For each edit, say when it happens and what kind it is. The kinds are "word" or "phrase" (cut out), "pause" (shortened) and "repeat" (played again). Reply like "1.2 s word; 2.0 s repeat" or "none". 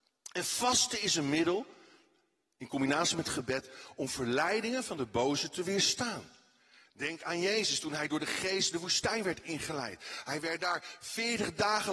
none